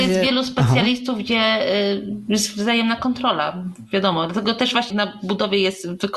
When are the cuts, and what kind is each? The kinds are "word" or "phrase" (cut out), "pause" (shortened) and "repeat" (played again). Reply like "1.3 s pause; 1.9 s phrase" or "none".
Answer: 4.9 s phrase